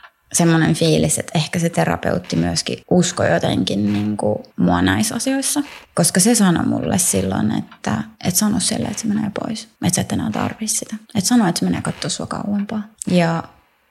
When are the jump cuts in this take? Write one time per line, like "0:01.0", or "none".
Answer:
0:02.8
0:04.5
0:05.8
0:08.1
0:09.7
0:11.0
0:13.0